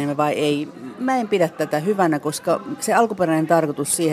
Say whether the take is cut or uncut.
uncut